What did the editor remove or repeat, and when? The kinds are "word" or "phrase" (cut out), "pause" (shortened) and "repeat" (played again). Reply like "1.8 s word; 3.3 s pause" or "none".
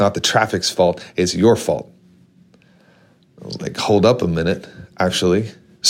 none